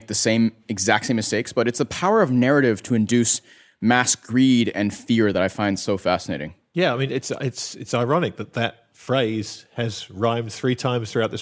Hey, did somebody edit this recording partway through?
no; 0 cuts

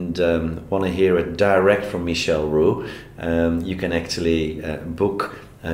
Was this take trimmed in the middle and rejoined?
no; 0 cuts

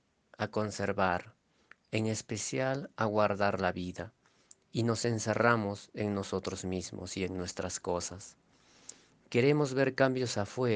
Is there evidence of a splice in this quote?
no; 0 cuts

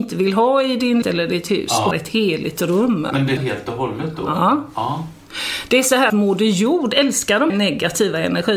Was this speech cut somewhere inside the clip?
yes; 5 cuts; at 1.0 s, 1.9 s, 3.4 s, 6.1 s, 7.5 s

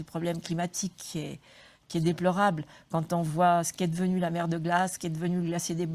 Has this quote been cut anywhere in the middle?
no; 0 cuts

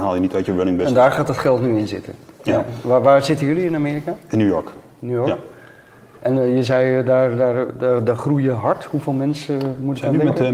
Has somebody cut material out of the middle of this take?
no; 0 cuts

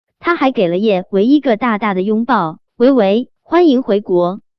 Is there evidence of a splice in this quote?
yes; 2 cuts; at 2.7 s, 3.4 s

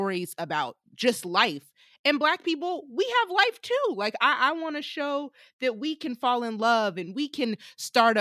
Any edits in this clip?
no; 0 cuts

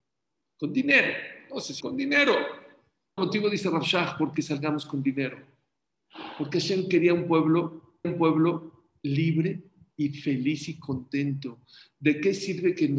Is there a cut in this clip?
yes; 4 cuts; at 1.8 s, 3.2 s, 4.3 s, 8.0 s

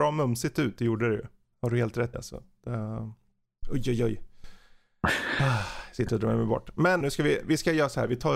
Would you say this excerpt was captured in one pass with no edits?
no; 3 cuts; at 2.1 s, 3.6 s, 7.0 s

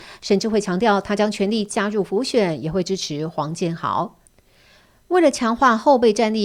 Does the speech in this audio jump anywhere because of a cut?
no; 0 cuts

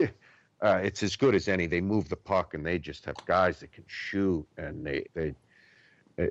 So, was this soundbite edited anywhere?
yes; 1 cut; at 5.1 s

